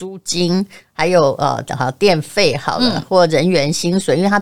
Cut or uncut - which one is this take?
uncut